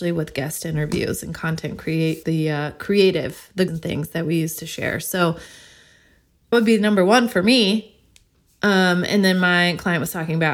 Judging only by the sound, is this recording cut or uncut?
cut